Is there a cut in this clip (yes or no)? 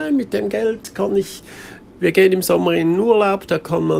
no